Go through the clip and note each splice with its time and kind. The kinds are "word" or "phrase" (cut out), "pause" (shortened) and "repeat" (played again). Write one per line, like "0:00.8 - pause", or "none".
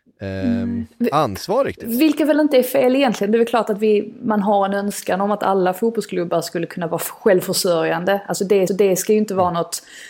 0:08.7 - repeat